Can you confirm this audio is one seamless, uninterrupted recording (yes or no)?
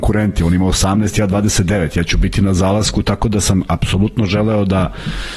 yes